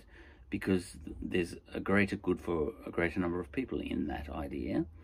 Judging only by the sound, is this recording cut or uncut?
uncut